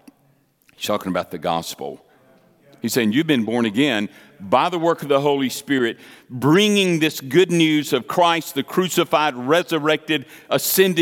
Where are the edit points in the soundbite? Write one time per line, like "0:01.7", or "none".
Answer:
none